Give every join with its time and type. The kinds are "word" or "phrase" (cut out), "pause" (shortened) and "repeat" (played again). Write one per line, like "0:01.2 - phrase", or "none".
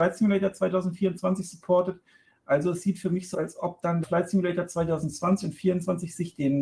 0:03.3 - word
0:04.0 - word